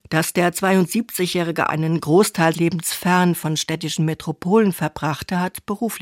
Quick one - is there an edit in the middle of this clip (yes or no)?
yes